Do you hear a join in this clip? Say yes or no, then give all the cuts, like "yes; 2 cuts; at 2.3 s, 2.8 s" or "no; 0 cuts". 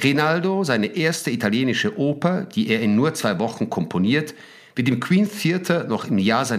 no; 0 cuts